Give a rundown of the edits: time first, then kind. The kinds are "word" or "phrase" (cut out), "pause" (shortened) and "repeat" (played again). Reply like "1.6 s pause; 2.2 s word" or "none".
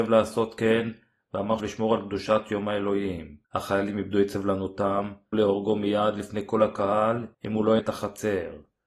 1.6 s phrase; 3.4 s pause; 5.3 s word; 7.3 s pause; 7.8 s word